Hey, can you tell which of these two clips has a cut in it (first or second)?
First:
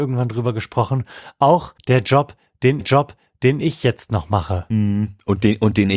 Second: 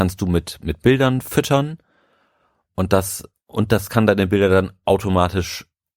first